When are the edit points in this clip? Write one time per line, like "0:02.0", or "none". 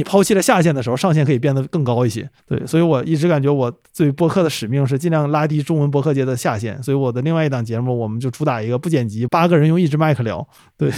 0:02.4
0:09.3